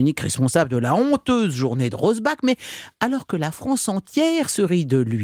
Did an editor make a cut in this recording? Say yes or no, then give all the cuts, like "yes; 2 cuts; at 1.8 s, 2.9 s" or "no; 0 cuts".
no; 0 cuts